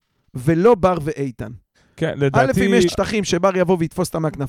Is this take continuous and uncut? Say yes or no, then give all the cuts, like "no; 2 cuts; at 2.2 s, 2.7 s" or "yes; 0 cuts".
no; 2 cuts; at 1.7 s, 2.9 s